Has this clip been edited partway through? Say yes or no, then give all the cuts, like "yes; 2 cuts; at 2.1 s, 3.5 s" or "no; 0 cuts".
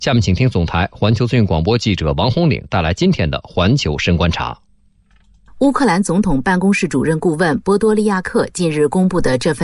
no; 0 cuts